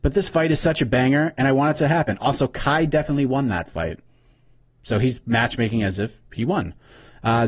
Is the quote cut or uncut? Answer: uncut